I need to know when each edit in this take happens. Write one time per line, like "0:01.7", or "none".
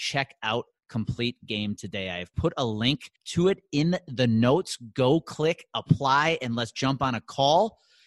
0:03.2